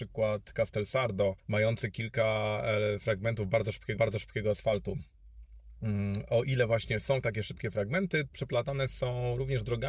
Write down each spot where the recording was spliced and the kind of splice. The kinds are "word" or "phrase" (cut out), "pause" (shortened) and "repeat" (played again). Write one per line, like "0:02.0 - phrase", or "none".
0:01.4 - pause
0:04.0 - repeat
0:08.3 - word